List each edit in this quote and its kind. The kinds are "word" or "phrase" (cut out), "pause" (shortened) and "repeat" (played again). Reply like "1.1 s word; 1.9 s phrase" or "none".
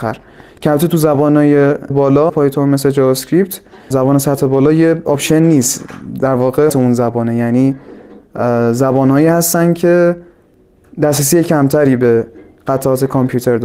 1.9 s word; 2.3 s word; 3.9 s word; 6.7 s word

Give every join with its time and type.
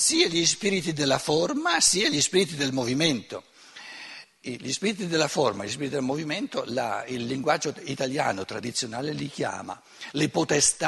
none

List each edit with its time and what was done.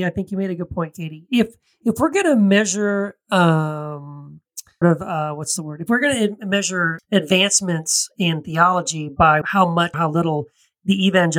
4.8 s word; 7.0 s word; 9.4 s word; 9.9 s word

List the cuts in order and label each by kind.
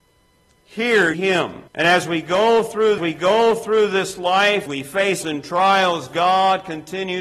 1.1 s word; 1.7 s pause; 3.0 s repeat; 4.7 s phrase; 5.2 s word

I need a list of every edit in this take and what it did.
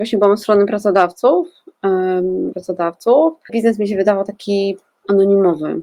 2.5 s phrase; 3.5 s word

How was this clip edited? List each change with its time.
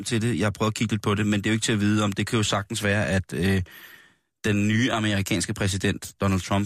none

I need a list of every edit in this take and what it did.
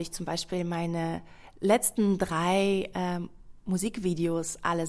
none

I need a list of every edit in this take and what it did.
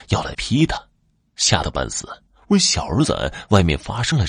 2.3 s pause

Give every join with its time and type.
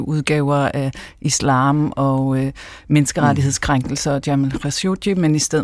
none

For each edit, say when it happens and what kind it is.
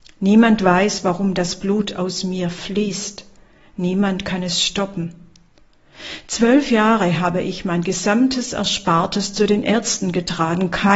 none

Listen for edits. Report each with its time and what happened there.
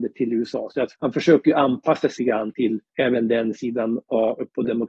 0.9 s word; 2.2 s word; 2.9 s pause

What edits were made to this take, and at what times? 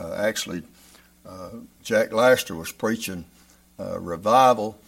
none

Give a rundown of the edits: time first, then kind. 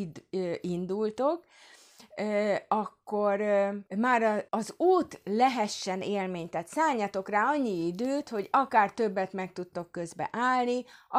3.9 s pause; 4.5 s pause

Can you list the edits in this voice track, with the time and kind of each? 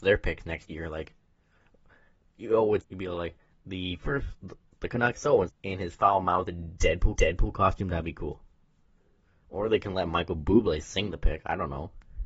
2.8 s word; 3.5 s pause; 5.1 s word; 5.5 s word; 7.2 s repeat

